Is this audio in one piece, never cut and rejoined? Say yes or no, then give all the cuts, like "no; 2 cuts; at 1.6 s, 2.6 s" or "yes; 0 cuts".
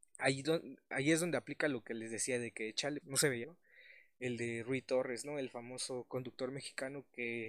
no; 2 cuts; at 3.0 s, 3.4 s